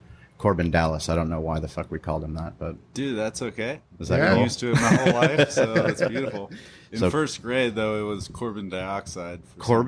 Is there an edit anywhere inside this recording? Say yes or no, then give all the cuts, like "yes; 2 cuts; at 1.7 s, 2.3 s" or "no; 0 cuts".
no; 0 cuts